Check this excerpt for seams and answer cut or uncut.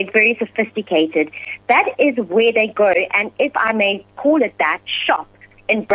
uncut